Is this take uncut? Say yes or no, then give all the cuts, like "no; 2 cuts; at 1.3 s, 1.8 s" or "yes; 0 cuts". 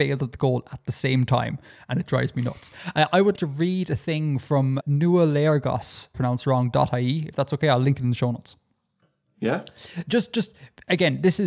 no; 3 cuts; at 3.4 s, 4.8 s, 6.1 s